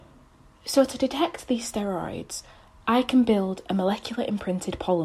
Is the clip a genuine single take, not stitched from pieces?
yes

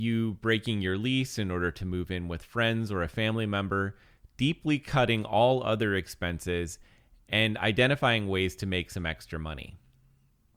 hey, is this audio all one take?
yes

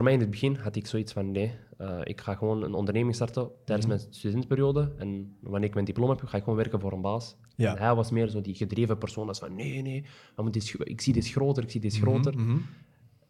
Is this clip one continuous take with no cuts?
yes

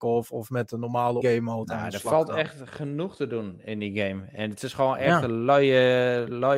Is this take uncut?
no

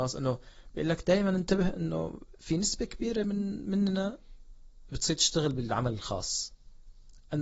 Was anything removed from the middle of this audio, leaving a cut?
no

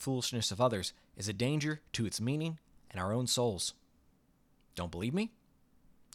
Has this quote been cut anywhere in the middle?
no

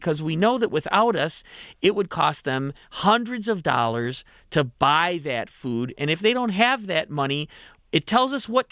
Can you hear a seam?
no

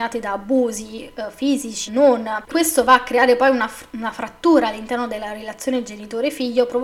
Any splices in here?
yes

